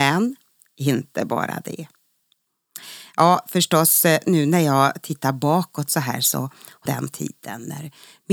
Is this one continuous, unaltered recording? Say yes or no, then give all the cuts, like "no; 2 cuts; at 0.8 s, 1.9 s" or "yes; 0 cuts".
no; 1 cut; at 6.9 s